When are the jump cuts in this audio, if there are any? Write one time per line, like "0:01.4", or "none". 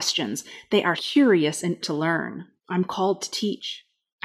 0:01.0
0:01.8
0:02.6